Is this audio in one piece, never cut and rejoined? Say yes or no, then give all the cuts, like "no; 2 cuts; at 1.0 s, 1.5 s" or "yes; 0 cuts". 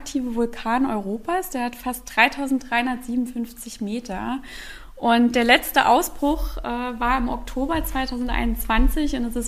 yes; 0 cuts